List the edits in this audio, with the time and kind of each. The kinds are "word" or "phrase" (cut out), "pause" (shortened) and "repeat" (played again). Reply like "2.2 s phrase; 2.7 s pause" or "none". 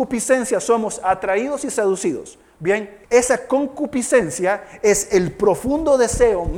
3.0 s pause